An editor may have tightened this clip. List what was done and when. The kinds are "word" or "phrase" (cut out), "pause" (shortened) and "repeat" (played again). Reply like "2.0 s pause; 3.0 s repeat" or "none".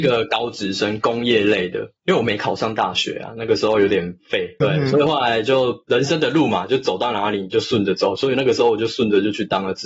4.6 s word

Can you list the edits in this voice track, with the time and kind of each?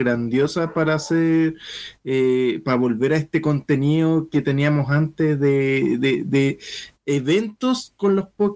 none

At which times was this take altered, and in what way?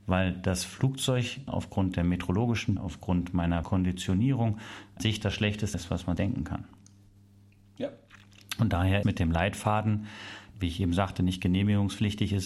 1.5 s word; 2.8 s word; 3.6 s word; 5.0 s word; 5.7 s word; 6.2 s word; 9.0 s word; 10.5 s word

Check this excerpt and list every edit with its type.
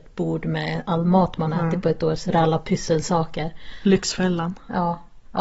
none

